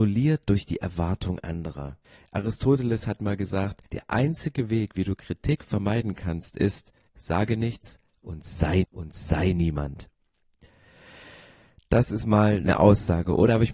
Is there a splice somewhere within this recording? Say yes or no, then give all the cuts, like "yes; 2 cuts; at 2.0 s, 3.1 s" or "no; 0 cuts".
yes; 4 cuts; at 2.0 s, 3.9 s, 7.1 s, 8.8 s